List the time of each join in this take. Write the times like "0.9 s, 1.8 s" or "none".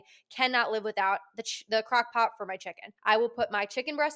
3.0 s